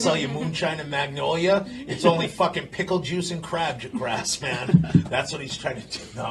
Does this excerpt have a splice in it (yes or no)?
no